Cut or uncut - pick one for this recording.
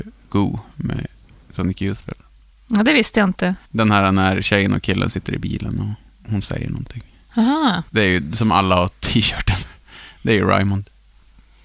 cut